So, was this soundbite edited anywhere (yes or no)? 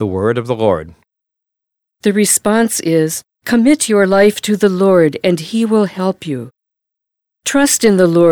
yes